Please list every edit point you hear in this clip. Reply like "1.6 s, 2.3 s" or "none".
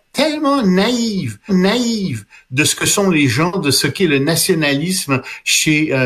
1.5 s